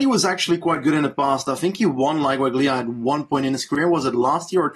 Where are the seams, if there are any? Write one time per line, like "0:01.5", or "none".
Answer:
none